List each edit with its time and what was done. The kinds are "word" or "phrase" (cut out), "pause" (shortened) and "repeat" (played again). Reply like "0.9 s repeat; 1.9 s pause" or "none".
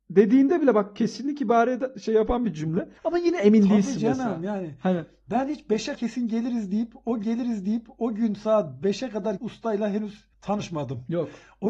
3.0 s pause; 5.9 s word; 7.2 s repeat; 9.4 s phrase; 10.3 s pause